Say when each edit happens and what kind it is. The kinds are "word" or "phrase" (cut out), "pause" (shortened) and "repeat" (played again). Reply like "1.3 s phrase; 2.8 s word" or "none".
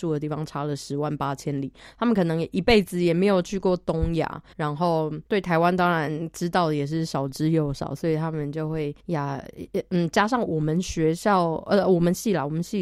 4.5 s pause; 5.3 s pause; 9.0 s pause